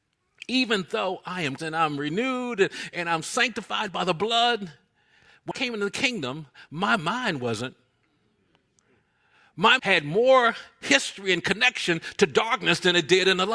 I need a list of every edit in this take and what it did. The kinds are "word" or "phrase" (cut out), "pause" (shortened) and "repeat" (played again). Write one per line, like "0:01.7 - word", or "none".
0:01.6 - word
0:05.5 - word
0:09.8 - word